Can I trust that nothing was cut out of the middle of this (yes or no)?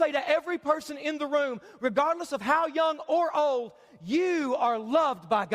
yes